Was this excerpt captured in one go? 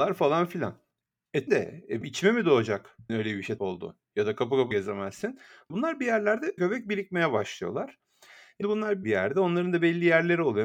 no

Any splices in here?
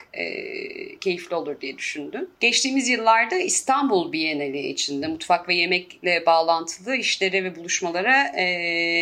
no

